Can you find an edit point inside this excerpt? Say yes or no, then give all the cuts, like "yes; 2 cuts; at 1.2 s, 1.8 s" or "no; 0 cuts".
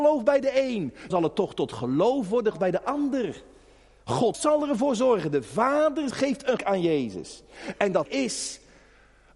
yes; 6 cuts; at 1.1 s, 2.5 s, 4.3 s, 6.1 s, 6.6 s, 8.1 s